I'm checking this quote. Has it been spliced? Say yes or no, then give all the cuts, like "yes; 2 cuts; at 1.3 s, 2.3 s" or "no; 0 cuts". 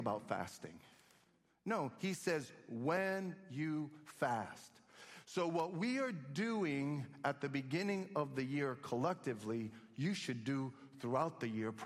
no; 0 cuts